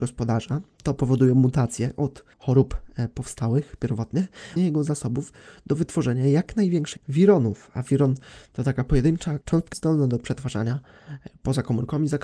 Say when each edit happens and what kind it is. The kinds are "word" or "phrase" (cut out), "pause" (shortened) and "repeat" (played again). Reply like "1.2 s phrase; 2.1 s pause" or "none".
2.3 s pause; 4.6 s phrase; 7.0 s word; 9.4 s word; 9.7 s word

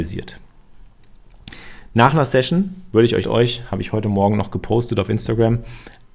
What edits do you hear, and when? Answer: 3.2 s phrase

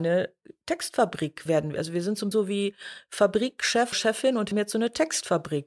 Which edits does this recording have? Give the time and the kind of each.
1.5 s word; 2.3 s word; 3.9 s word; 4.5 s word

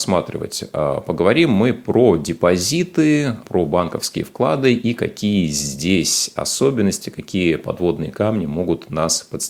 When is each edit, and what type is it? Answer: 3.4 s word

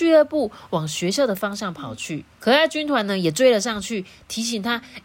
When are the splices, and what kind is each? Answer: 2.3 s pause

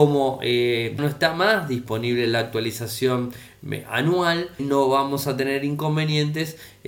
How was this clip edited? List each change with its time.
1.0 s word; 4.6 s word

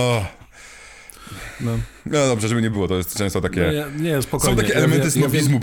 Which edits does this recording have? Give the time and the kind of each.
none

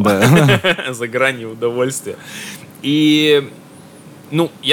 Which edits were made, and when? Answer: none

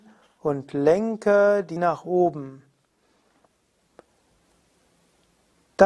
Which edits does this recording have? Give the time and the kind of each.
1.8 s word

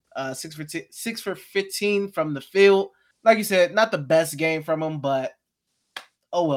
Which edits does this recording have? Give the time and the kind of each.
3.1 s pause

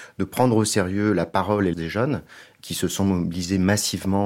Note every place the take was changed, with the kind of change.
1.7 s word

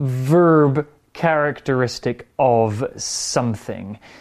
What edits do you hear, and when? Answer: none

